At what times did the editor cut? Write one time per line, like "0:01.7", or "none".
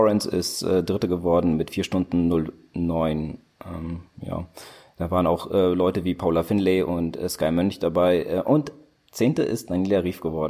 none